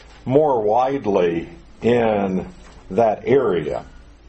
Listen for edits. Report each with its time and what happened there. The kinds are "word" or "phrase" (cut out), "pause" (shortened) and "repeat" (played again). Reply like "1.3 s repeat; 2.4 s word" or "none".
2.8 s pause